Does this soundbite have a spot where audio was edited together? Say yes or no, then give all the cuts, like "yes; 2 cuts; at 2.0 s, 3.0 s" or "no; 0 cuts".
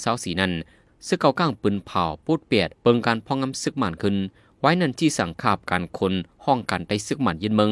yes; 1 cut; at 2.7 s